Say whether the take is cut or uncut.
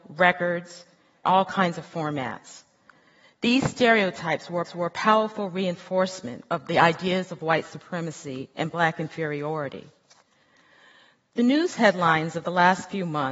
cut